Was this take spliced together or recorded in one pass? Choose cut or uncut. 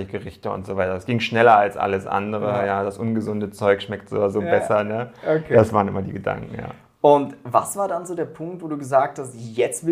uncut